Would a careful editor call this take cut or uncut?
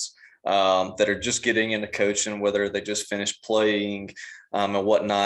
uncut